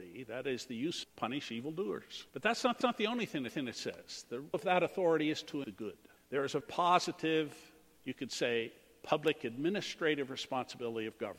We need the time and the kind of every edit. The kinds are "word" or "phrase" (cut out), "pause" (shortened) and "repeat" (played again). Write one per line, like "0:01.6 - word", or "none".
0:01.0 - phrase
0:02.3 - pause
0:02.8 - repeat
0:03.5 - repeat
0:04.5 - word
0:05.6 - word
0:06.2 - pause
0:06.6 - word